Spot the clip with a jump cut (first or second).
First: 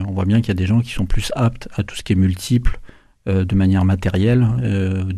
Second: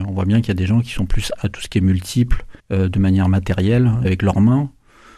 second